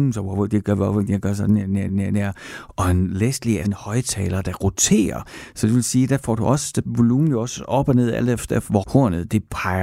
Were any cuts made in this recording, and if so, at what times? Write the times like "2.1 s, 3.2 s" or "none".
1.9 s, 3.6 s, 6.9 s, 8.8 s

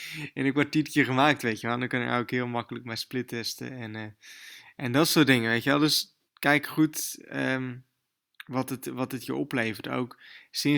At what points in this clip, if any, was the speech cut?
6.3 s, 8.2 s

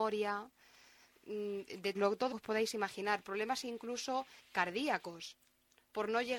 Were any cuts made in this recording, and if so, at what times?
1.9 s, 2.3 s

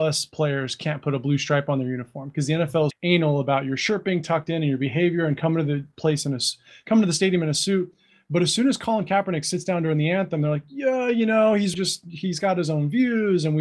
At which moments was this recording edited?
2.9 s, 11.7 s

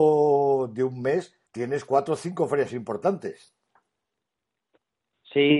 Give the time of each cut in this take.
1.5 s

